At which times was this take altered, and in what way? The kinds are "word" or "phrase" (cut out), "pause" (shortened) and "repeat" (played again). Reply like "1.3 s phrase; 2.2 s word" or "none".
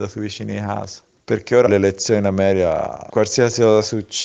1.2 s pause; 1.7 s word

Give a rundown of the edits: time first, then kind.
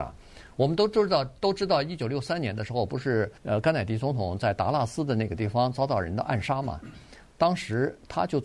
3.4 s pause

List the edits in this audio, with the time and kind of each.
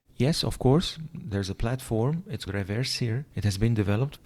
2.5 s word

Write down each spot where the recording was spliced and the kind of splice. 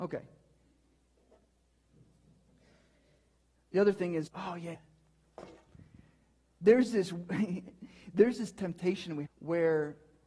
4.3 s word; 4.7 s word; 9.2 s word

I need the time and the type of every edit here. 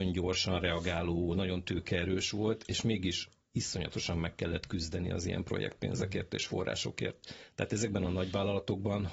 none

